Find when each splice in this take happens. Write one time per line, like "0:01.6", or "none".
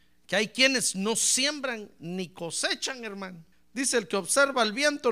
0:03.5

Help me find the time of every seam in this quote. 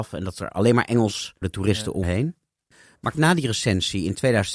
0:01.4
0:02.0
0:03.1

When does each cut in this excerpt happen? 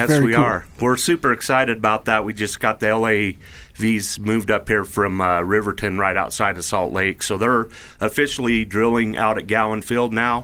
none

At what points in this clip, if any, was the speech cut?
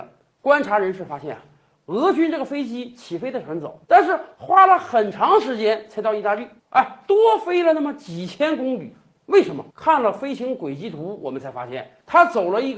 0:03.8
0:06.6
0:09.7

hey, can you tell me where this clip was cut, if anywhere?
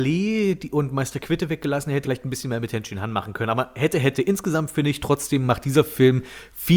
0:02.0

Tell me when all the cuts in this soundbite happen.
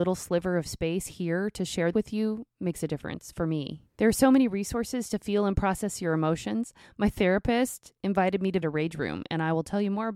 0:01.9
0:02.5
0:03.9
0:08.6

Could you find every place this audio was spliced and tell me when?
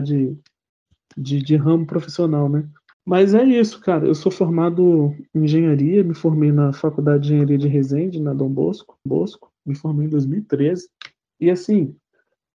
0:02.9
0:09.1

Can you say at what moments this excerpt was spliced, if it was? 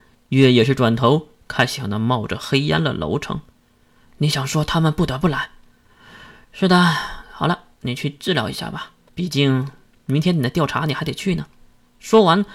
0:09.1

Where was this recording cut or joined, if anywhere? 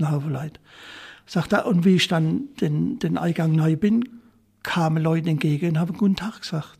none

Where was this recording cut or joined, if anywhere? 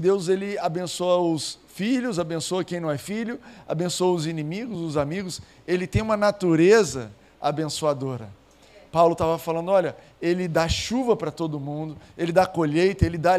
none

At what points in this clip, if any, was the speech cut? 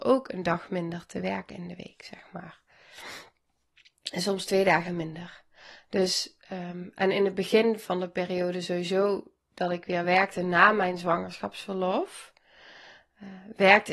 none

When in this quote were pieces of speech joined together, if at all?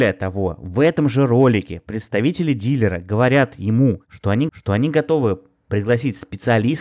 0:04.5

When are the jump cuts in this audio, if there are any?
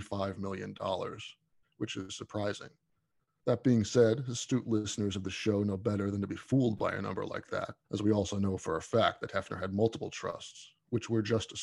0:07.8

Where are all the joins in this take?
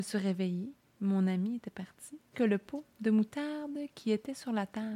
0:02.3

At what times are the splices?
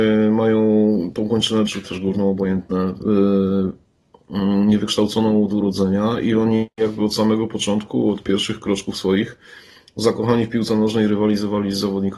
0:01.7

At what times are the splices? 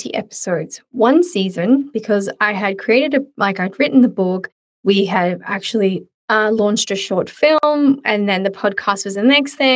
none

